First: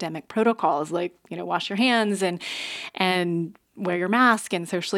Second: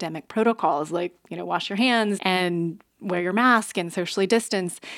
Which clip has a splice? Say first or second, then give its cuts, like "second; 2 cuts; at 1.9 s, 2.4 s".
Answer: second; 1 cut; at 2.2 s